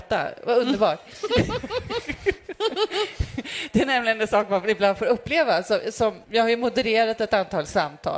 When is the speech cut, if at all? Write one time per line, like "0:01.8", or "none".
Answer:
0:06.2